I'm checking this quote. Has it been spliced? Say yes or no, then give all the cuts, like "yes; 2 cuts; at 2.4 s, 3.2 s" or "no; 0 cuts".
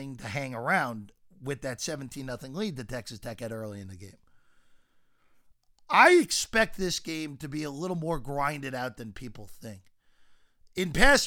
no; 0 cuts